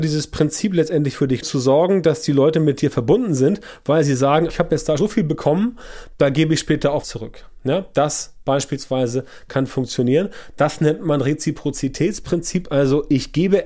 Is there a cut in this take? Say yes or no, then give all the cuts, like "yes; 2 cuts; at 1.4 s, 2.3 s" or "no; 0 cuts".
yes; 4 cuts; at 1.4 s, 4.5 s, 5.0 s, 7.0 s